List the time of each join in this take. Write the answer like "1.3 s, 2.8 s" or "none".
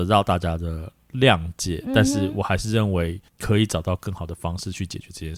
3.3 s